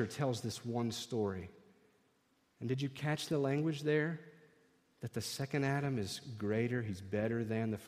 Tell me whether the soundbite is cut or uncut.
uncut